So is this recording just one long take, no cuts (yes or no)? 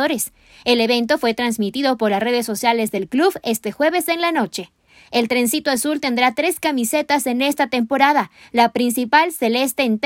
yes